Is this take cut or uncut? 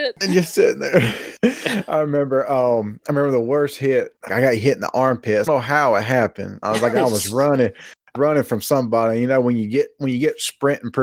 cut